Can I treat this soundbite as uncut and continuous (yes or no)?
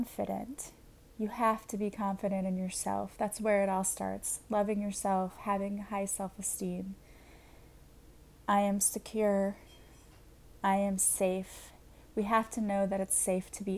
no